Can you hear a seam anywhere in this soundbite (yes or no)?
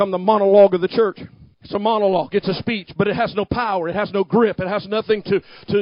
yes